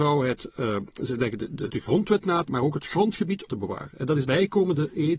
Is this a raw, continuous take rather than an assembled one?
no; 4 cuts; at 1.7 s, 2.5 s, 3.5 s, 4.2 s

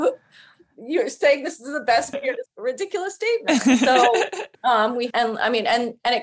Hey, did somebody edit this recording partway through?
yes; 4 cuts; at 2.1 s, 2.5 s, 4.5 s, 5.1 s

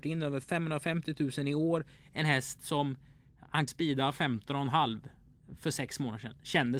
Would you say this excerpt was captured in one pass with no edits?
no; 2 cuts; at 3.7 s, 5.6 s

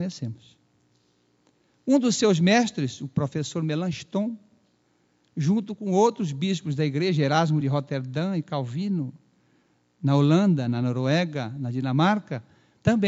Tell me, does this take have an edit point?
no; 0 cuts

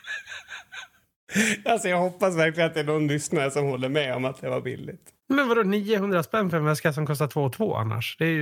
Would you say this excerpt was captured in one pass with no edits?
no; 1 cut; at 5.2 s

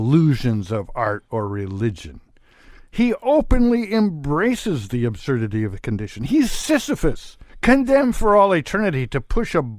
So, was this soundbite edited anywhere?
yes; 1 cut; at 7.5 s

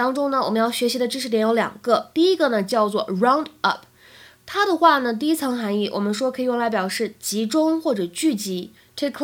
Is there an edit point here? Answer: no; 0 cuts

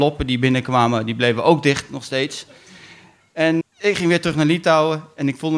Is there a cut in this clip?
yes; 1 cut; at 3.6 s

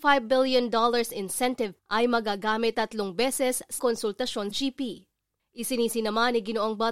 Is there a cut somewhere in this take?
yes; 4 cuts; at 1.8 s, 2.7 s, 3.8 s, 4.5 s

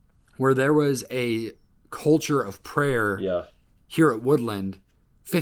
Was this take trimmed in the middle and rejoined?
no; 0 cuts

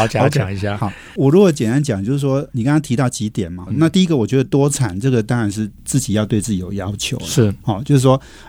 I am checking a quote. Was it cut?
yes; 1 cut; at 3.7 s

